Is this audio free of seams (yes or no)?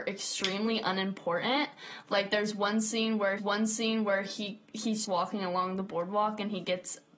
no